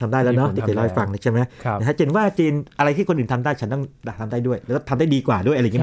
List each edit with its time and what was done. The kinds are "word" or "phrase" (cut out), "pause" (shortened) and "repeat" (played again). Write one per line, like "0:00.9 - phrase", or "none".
none